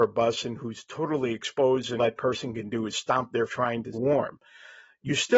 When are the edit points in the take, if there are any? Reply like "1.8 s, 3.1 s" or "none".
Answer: 2.0 s, 3.5 s, 3.9 s